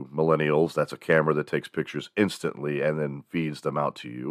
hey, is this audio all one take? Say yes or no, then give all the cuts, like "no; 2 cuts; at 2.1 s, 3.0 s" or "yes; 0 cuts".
yes; 0 cuts